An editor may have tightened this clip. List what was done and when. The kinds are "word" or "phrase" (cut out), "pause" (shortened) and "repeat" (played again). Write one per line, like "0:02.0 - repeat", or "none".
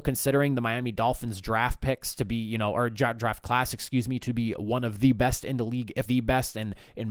0:06.1 - word